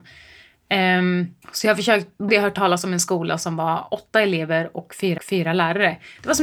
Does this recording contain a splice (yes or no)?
yes